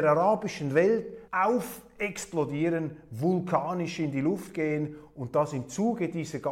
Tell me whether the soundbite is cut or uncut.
cut